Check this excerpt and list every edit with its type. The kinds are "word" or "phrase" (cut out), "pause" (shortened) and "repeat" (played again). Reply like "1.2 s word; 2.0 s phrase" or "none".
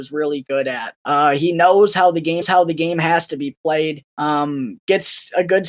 1.0 s pause; 2.4 s repeat; 4.1 s pause